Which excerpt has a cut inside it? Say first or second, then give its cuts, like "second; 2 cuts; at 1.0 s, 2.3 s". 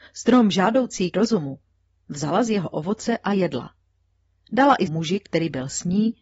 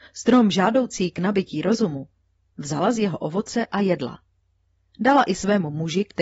first; 2 cuts; at 1.1 s, 4.9 s